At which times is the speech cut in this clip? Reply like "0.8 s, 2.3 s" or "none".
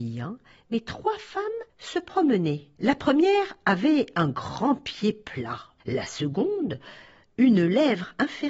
1.7 s, 2.8 s, 5.8 s